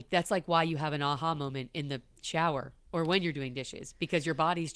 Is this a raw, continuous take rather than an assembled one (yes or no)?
yes